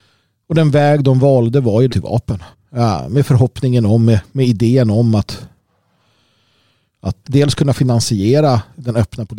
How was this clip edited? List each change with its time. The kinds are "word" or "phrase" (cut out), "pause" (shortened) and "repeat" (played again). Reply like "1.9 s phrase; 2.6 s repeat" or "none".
1.9 s phrase; 2.5 s pause; 7.2 s word